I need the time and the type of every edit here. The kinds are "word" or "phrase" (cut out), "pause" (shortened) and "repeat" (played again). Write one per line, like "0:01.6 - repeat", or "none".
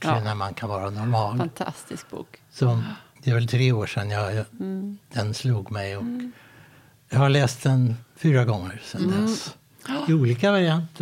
0:03.2 - word